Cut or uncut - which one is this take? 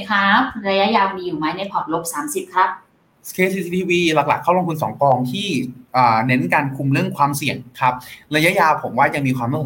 uncut